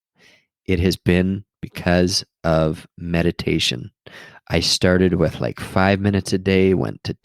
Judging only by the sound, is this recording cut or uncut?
uncut